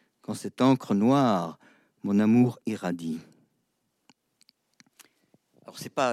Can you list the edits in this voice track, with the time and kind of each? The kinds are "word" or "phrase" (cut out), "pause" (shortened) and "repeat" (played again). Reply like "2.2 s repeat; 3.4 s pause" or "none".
none